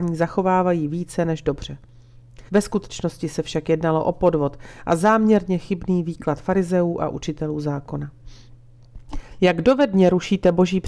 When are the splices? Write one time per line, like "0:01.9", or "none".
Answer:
0:02.5